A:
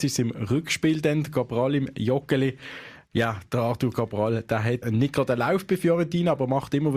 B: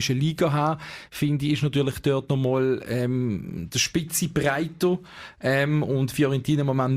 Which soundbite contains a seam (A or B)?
A